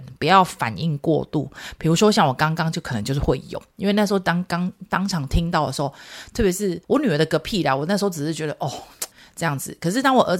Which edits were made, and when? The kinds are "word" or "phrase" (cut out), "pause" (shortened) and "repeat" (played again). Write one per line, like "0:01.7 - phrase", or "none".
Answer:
0:06.8 - pause
0:09.1 - pause